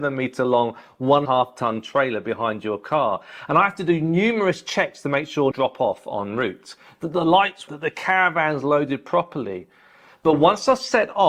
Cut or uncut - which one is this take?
cut